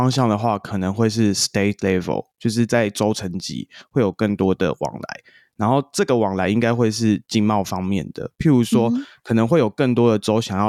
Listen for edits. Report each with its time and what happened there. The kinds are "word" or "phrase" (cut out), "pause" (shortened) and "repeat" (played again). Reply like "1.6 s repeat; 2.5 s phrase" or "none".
none